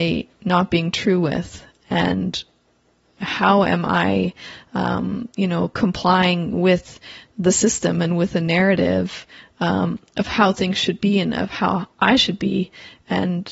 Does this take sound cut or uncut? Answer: uncut